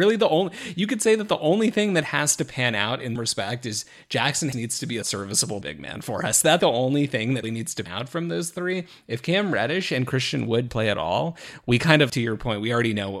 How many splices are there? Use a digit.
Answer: 9